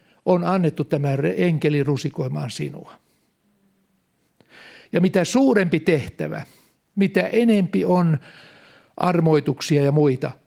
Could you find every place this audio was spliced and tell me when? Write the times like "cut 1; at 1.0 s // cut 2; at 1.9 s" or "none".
none

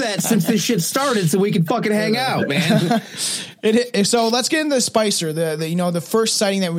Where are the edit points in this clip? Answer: none

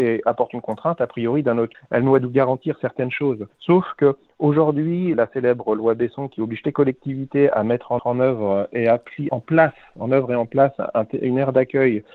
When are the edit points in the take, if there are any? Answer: cut 1; at 1.7 s // cut 2; at 3.5 s // cut 3; at 5.1 s // cut 4; at 6.6 s // cut 5; at 8.0 s // cut 6; at 9.3 s

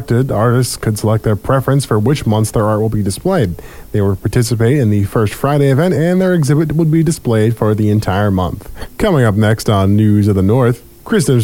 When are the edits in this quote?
none

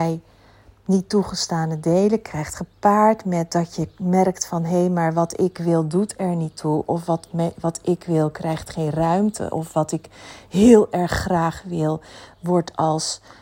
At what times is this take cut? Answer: none

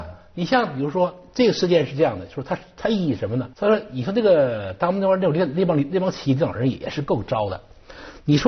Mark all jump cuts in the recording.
cut 1; at 3.5 s

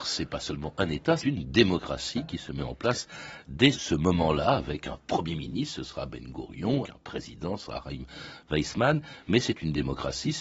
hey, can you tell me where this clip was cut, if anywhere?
cut 1; at 1.2 s // cut 2; at 3.7 s // cut 3; at 6.8 s

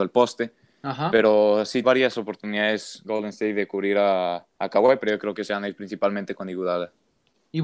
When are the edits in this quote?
cut 1; at 1.8 s // cut 2; at 4.5 s

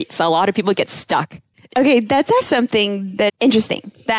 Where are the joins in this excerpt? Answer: cut 1; at 2.4 s // cut 2; at 3.3 s

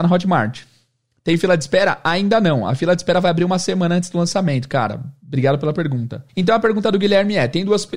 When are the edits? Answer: cut 1; at 6.3 s

